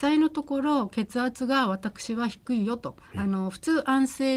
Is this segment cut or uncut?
cut